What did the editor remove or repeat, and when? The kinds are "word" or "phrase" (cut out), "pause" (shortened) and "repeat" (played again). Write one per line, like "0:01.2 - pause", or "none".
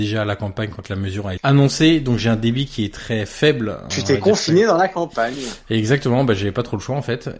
0:01.4 - word